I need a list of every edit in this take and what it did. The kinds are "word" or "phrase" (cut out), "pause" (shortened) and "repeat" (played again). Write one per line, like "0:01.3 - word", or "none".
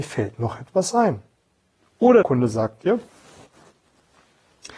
0:02.2 - word